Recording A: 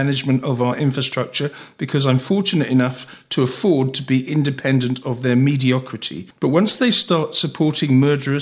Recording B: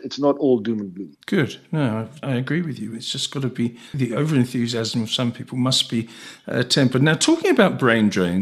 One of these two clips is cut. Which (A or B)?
B